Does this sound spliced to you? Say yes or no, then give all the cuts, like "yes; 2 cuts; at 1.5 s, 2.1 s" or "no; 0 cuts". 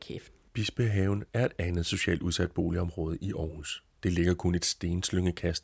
no; 0 cuts